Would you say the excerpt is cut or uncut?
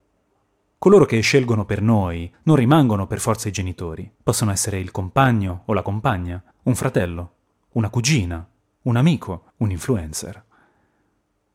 cut